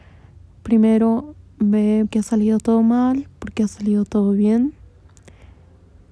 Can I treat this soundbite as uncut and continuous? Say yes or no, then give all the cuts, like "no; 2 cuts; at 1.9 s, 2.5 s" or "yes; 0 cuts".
no; 1 cut; at 2.1 s